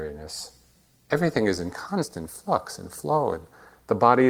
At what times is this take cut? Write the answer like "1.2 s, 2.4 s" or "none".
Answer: none